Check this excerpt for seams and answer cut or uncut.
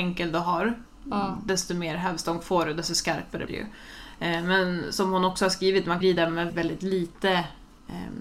cut